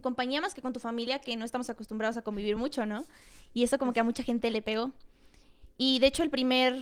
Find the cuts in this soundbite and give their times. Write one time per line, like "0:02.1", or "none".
none